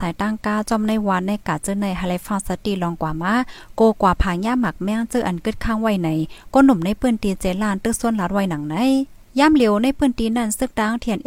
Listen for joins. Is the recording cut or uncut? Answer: cut